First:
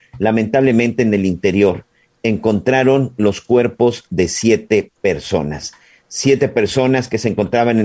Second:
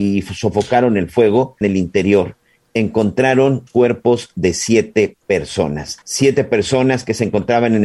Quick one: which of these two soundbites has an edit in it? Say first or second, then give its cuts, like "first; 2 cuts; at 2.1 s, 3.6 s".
second; 3 cuts; at 1.6 s, 3.7 s, 6.0 s